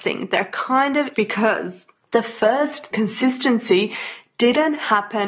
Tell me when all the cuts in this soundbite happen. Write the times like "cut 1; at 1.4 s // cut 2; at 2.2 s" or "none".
cut 1; at 1.1 s // cut 2; at 2.0 s // cut 3; at 2.9 s